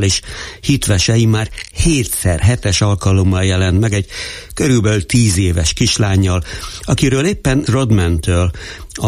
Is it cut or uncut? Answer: cut